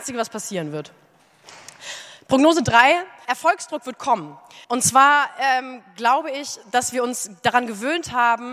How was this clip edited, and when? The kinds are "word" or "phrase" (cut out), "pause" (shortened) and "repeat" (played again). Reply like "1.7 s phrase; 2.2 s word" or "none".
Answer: 3.2 s word; 4.6 s pause